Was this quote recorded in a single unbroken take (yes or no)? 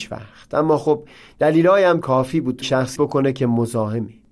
no